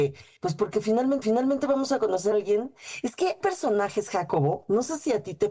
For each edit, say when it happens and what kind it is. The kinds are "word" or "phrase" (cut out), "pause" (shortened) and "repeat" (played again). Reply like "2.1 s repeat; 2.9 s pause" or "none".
1.2 s repeat; 2.3 s word; 3.4 s word